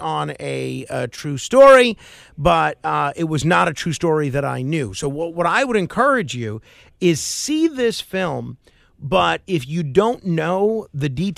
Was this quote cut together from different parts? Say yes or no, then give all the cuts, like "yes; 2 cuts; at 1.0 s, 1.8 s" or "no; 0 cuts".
no; 0 cuts